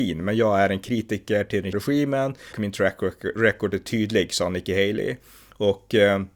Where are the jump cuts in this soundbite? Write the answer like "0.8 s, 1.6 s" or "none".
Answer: 1.7 s, 2.5 s

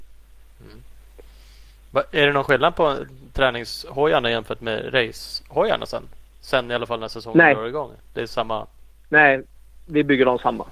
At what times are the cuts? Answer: none

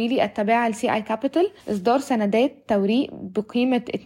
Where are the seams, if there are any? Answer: 1.6 s

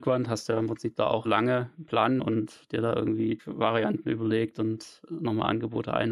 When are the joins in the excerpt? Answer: 1.2 s, 2.2 s, 3.4 s

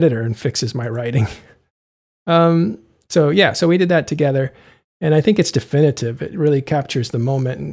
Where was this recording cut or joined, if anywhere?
none

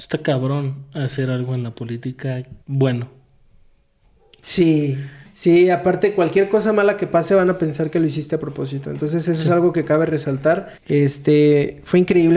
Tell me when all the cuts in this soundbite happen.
2.6 s, 5.3 s, 10.8 s

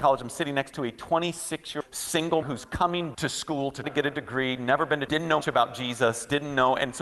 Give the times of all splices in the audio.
1.8 s, 2.4 s, 3.1 s, 3.8 s, 5.1 s, 5.4 s

